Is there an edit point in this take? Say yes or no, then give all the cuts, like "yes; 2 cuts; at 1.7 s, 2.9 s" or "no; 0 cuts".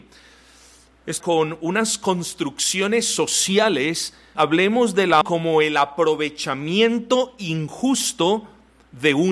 yes; 3 cuts; at 1.2 s, 4.3 s, 5.2 s